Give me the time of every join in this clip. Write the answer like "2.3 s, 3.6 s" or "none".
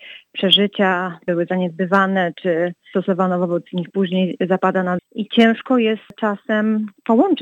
3.9 s, 5.0 s